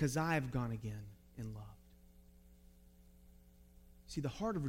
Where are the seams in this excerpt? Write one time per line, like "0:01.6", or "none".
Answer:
none